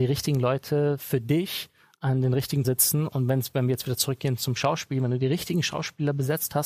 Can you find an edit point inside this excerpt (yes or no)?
yes